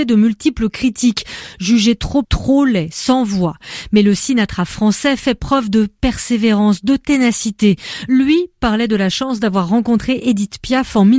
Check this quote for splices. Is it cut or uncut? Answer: cut